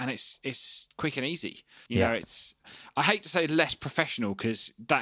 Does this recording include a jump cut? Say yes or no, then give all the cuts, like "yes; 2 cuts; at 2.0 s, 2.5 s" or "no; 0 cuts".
yes; 1 cut; at 1.9 s